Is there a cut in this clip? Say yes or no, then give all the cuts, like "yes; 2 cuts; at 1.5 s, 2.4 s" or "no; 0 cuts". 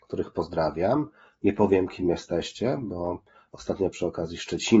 no; 0 cuts